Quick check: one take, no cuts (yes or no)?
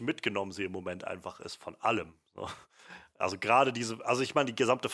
yes